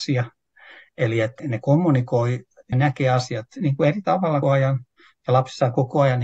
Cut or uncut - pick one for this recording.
cut